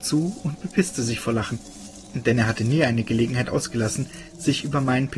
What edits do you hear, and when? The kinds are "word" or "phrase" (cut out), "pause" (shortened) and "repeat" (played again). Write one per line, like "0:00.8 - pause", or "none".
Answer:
none